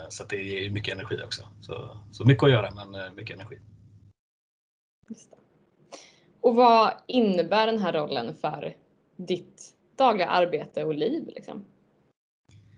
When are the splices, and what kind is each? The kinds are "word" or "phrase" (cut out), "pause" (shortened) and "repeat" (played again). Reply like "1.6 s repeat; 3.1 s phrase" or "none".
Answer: none